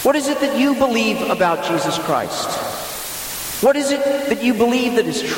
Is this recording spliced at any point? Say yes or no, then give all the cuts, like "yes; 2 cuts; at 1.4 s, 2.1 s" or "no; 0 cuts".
no; 0 cuts